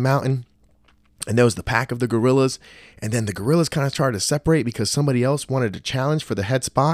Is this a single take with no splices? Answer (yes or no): yes